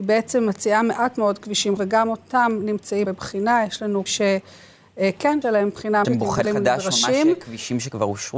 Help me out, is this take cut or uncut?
cut